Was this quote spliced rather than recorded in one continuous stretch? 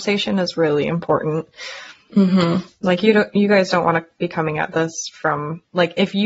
no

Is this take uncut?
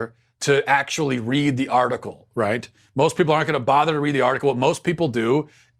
yes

